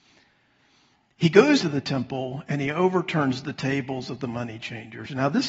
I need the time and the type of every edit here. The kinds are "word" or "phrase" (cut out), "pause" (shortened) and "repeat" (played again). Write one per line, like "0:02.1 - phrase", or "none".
0:01.6 - word